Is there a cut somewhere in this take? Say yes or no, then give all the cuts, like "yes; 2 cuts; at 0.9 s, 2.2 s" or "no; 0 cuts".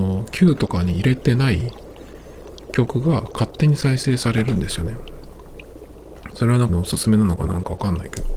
yes; 1 cut; at 6.7 s